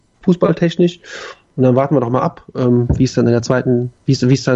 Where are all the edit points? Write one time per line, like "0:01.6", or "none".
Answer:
none